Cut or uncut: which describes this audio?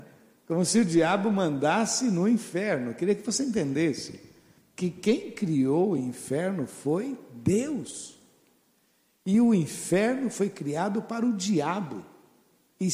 uncut